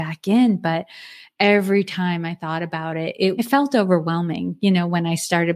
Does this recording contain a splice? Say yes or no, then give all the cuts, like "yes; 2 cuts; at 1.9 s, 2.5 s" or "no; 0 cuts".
yes; 1 cut; at 3.4 s